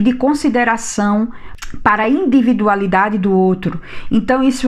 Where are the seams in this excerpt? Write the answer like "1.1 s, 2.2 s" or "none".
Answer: none